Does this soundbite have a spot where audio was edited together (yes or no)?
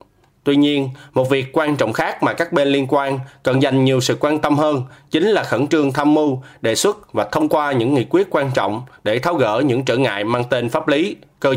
no